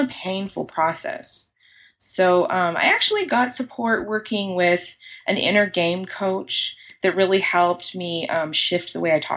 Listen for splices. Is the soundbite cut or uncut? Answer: uncut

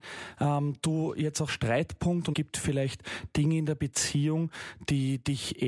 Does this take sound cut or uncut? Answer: cut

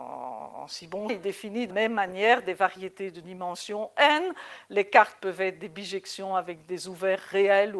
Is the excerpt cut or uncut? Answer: cut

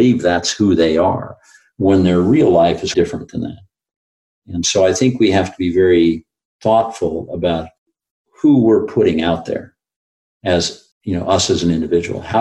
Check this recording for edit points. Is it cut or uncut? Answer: cut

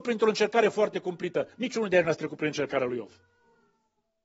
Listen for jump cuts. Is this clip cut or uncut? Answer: uncut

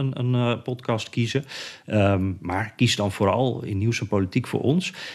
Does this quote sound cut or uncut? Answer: uncut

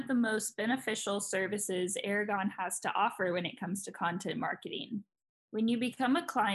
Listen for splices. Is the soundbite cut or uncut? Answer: uncut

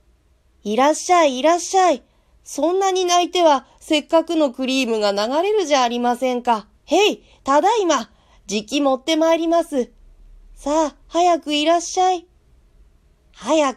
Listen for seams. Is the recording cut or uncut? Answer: cut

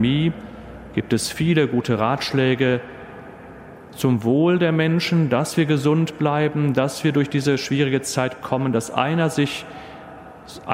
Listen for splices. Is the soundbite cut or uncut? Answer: uncut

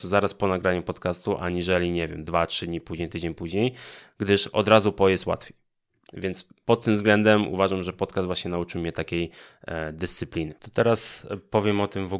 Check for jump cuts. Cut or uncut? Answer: uncut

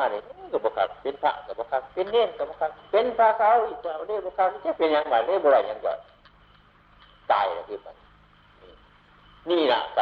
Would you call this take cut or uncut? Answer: uncut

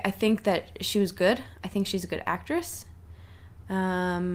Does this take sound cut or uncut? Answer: uncut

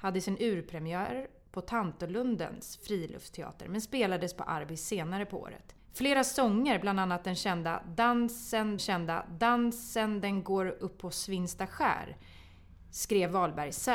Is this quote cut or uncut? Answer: cut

